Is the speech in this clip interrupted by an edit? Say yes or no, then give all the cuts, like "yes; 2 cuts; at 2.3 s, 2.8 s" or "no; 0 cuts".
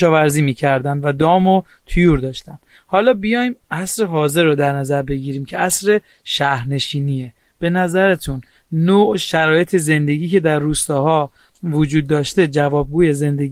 no; 0 cuts